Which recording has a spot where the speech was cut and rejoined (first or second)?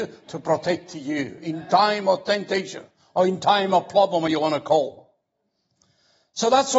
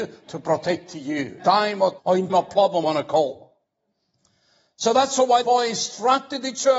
second